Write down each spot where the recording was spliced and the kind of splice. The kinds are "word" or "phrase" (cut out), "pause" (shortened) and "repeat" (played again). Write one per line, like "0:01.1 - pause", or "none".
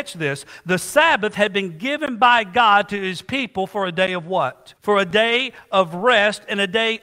0:04.8 - pause